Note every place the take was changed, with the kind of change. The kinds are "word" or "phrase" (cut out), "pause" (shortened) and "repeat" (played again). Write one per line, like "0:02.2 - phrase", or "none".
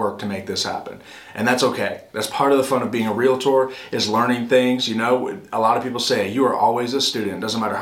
none

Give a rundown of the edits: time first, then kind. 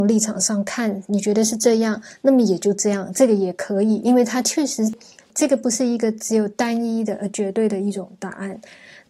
none

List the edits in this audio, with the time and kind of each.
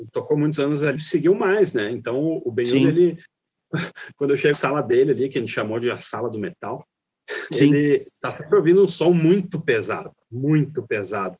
0:01.0 - phrase
0:04.5 - word

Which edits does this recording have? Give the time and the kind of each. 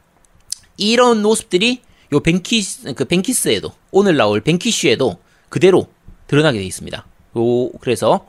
none

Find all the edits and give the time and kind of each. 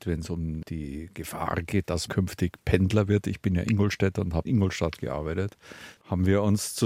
0:02.1 - word
0:04.5 - word

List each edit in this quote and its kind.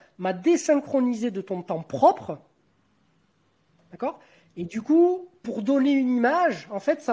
none

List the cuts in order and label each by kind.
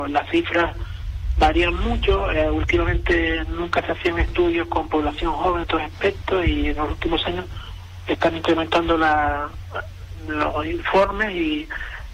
0:05.6 - word

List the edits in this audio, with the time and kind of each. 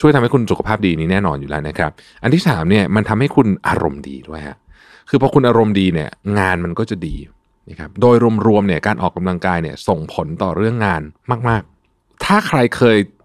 none

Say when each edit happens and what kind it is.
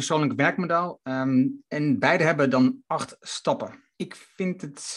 0:03.9 - pause

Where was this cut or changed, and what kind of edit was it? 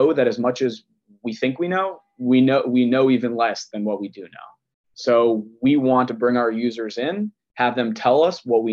none

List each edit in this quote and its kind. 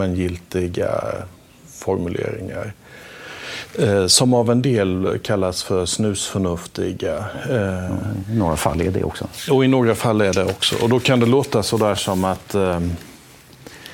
none

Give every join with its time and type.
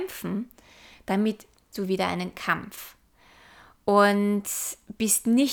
0:01.7 - word
0:02.3 - word

